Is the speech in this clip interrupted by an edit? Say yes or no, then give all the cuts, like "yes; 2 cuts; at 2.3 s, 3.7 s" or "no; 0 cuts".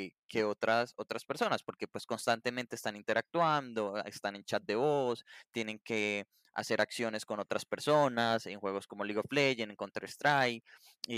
no; 0 cuts